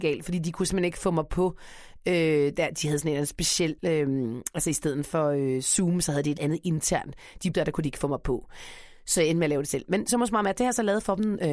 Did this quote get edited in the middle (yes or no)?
yes